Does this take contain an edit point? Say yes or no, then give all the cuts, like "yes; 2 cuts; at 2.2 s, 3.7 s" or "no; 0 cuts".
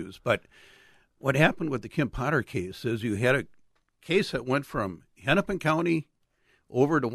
no; 0 cuts